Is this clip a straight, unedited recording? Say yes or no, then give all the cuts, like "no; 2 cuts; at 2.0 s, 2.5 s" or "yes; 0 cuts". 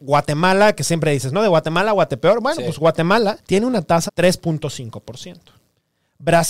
no; 2 cuts; at 3.4 s, 4.1 s